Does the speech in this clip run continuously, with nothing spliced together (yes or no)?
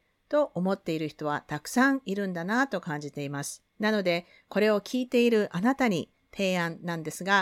no